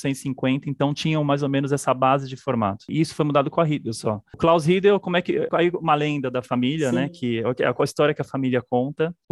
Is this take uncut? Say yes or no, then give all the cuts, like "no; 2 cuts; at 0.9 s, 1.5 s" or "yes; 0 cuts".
no; 1 cut; at 5.5 s